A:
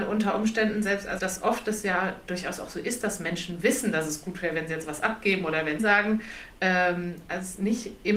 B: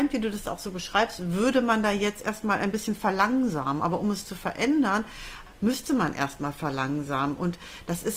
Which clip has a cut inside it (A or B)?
A